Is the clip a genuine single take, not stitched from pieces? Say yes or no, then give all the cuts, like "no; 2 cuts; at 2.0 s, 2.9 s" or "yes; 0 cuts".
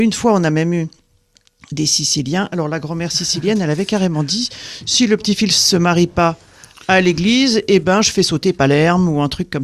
yes; 0 cuts